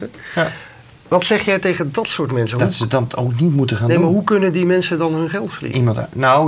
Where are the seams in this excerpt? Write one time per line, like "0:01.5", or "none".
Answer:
none